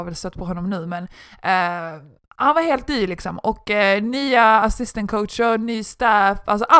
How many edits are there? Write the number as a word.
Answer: zero